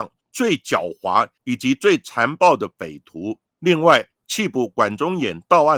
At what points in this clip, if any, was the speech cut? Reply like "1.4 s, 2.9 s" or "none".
3.5 s

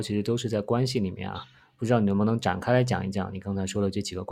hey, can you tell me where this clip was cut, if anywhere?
none

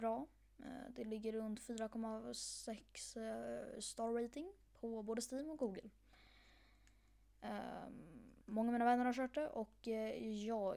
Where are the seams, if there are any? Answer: 8.4 s

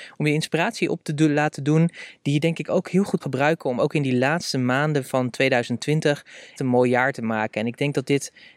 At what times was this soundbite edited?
3.2 s, 6.6 s

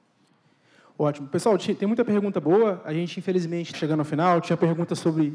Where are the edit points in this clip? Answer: 3.7 s

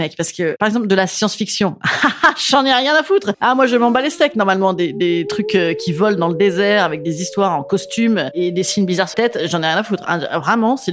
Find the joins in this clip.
9.1 s

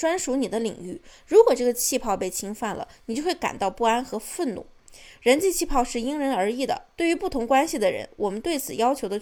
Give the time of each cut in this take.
none

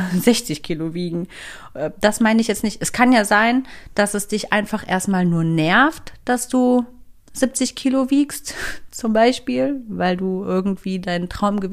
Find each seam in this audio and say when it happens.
7.2 s

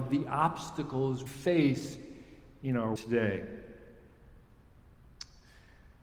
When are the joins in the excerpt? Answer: 1.3 s, 3.0 s

